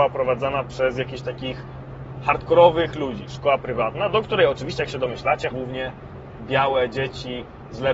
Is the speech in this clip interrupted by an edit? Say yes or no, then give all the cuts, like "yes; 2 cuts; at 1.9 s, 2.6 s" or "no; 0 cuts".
yes; 2 cuts; at 2.9 s, 5.5 s